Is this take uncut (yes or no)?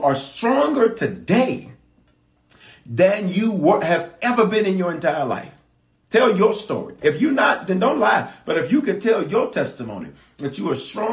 yes